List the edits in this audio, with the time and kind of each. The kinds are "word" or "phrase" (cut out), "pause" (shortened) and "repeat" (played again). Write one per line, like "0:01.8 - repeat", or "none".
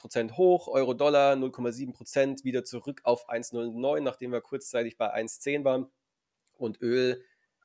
none